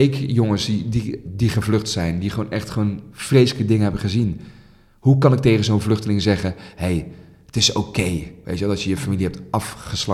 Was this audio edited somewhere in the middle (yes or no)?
no